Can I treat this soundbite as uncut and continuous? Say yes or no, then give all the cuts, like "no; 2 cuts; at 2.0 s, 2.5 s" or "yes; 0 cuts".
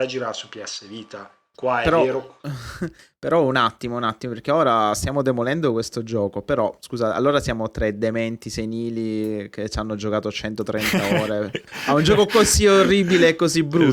yes; 0 cuts